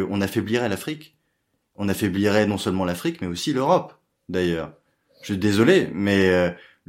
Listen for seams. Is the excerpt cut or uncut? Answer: uncut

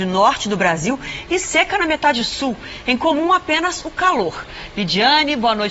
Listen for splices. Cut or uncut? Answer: uncut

